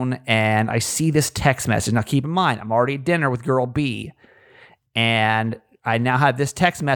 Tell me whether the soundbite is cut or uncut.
uncut